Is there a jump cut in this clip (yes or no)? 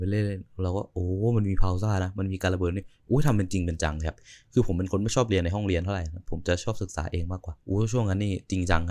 yes